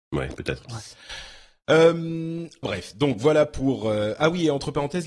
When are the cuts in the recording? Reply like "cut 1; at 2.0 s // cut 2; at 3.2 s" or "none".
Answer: cut 1; at 2.6 s